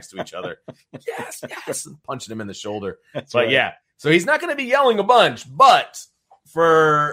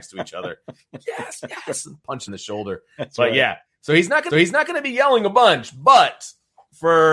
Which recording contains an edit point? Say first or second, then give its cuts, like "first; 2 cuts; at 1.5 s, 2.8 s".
second; 2 cuts; at 2.3 s, 4.3 s